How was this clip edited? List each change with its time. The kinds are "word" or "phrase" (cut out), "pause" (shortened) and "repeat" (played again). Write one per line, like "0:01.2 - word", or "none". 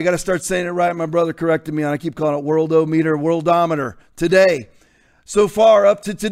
none